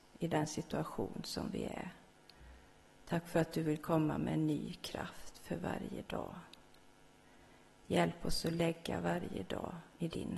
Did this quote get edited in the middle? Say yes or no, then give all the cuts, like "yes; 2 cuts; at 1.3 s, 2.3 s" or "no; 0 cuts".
no; 0 cuts